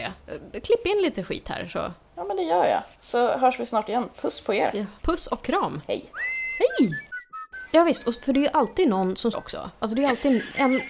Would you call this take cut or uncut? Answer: cut